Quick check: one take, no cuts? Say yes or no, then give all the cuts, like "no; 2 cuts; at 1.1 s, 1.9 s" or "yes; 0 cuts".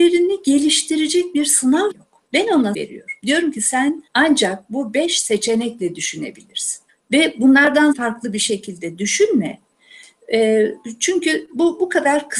no; 6 cuts; at 1.9 s, 2.3 s, 2.7 s, 4.1 s, 6.9 s, 7.9 s